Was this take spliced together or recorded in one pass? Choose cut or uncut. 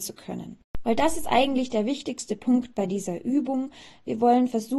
uncut